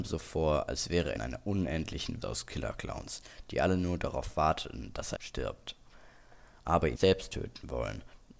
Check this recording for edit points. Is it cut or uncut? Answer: cut